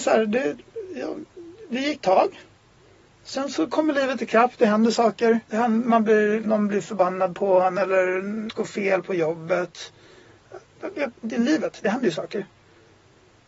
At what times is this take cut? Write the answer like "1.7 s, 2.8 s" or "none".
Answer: 2.0 s, 5.4 s, 6.4 s, 8.5 s